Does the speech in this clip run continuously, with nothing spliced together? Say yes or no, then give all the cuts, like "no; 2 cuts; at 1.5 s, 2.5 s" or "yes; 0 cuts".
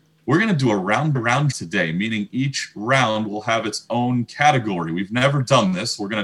no; 2 cuts; at 1.1 s, 1.5 s